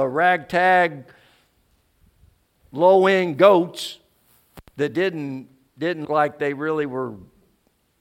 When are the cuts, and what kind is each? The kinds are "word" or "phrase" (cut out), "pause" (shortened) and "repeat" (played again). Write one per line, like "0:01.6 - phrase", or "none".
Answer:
0:06.0 - word